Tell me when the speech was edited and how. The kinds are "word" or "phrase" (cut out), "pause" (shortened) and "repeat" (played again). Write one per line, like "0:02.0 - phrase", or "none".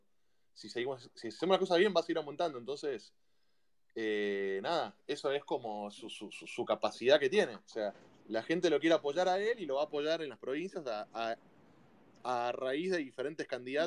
0:08.1 - pause